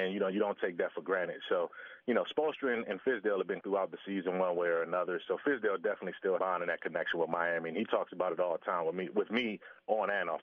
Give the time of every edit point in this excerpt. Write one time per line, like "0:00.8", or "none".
0:03.6
0:06.4